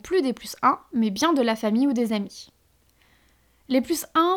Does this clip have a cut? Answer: no; 0 cuts

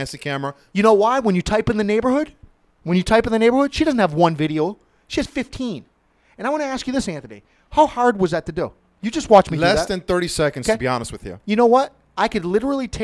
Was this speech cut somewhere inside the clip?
no; 0 cuts

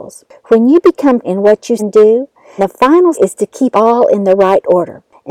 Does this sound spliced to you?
yes; 5 cuts; at 1.2 s, 1.8 s, 2.6 s, 3.1 s, 3.7 s

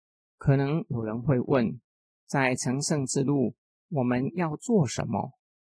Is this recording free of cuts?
yes; 0 cuts

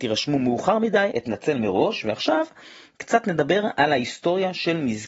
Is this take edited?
yes; 1 cut; at 1.1 s

